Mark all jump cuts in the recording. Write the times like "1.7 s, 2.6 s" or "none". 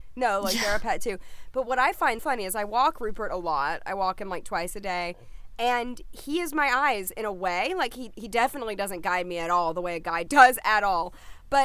2.2 s, 10.3 s